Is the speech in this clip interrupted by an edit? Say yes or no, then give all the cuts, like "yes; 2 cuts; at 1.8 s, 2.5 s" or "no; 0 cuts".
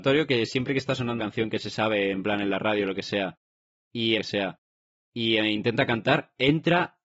yes; 2 cuts; at 1.2 s, 4.2 s